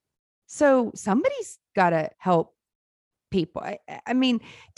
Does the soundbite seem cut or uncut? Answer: cut